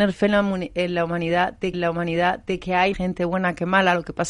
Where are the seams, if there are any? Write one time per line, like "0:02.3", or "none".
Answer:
0:01.7
0:02.9